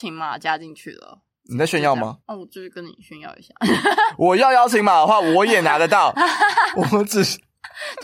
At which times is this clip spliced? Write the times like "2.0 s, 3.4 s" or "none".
2.2 s